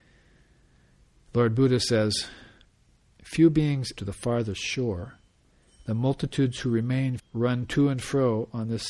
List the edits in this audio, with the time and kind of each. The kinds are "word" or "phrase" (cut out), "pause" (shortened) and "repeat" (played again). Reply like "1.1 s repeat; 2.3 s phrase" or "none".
4.0 s phrase; 7.2 s word